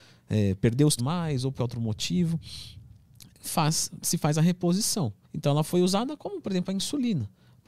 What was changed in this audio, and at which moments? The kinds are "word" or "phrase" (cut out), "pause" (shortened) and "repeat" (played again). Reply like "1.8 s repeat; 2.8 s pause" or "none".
1.0 s phrase; 1.6 s word; 3.3 s pause; 5.2 s pause